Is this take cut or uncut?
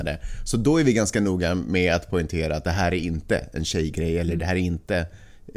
uncut